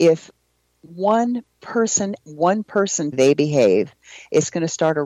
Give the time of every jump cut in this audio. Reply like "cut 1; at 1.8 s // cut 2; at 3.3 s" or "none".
cut 1; at 2.2 s // cut 2; at 3.1 s